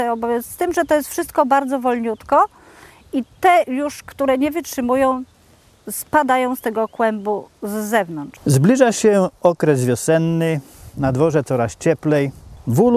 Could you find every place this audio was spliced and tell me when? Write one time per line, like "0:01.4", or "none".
none